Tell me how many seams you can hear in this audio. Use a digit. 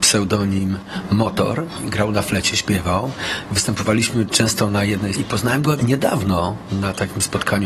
2